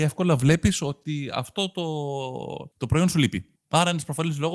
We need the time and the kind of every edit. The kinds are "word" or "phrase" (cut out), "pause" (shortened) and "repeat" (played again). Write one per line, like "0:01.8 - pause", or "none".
0:02.7 - pause
0:03.6 - pause